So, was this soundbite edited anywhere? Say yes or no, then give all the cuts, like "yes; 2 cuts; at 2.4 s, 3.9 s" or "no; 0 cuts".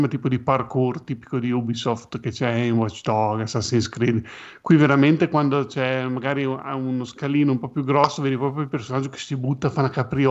no; 0 cuts